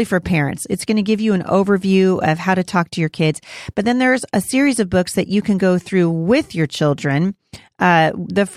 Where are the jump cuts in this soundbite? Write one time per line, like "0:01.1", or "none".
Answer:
none